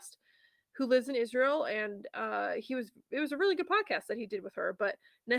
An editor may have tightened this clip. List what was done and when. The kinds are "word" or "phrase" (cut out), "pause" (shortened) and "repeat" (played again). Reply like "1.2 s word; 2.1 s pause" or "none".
none